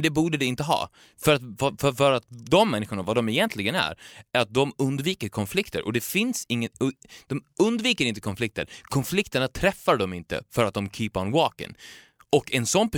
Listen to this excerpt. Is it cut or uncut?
uncut